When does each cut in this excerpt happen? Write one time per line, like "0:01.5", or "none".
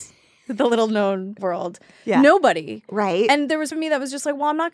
0:01.4
0:03.7